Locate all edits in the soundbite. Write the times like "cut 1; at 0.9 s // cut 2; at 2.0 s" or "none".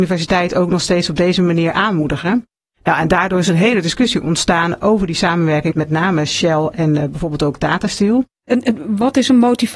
cut 1; at 5.7 s